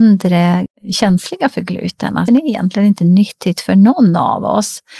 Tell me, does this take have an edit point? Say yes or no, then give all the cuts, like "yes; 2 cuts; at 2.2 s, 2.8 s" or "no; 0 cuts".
yes; 1 cut; at 2.3 s